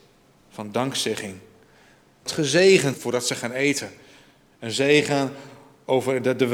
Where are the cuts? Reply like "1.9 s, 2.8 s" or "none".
2.3 s, 2.9 s